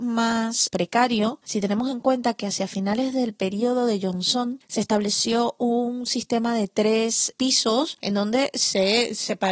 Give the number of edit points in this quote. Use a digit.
0